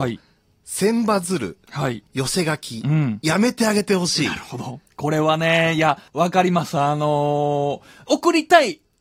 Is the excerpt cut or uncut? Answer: cut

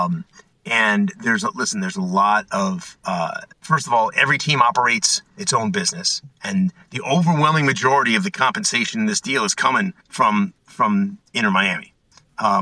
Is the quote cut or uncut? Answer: cut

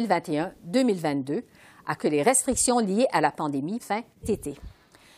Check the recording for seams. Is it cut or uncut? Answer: cut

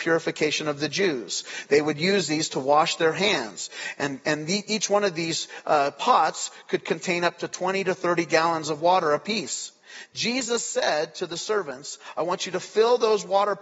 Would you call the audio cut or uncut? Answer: uncut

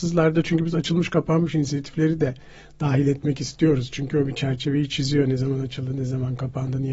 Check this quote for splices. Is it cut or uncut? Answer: uncut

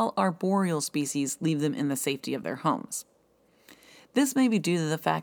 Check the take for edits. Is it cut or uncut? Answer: uncut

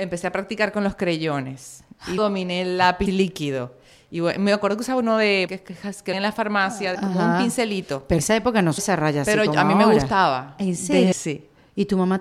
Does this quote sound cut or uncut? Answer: cut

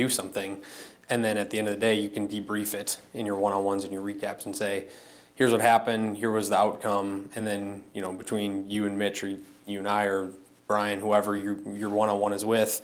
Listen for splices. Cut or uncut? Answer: uncut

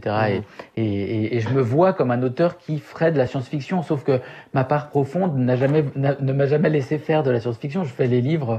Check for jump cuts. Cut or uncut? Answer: uncut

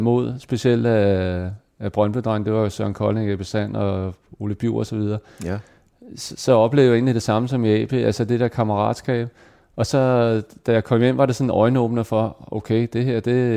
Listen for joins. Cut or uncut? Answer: uncut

